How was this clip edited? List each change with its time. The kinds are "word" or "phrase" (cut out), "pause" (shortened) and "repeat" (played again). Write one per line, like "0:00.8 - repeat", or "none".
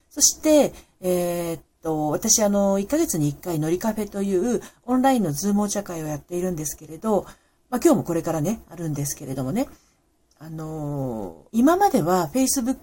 0:11.5 - pause